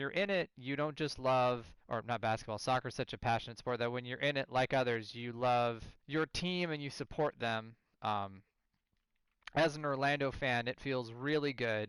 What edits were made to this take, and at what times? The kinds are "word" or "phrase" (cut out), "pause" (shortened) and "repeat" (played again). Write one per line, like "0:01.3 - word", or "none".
0:01.8 - pause
0:06.0 - pause
0:07.9 - pause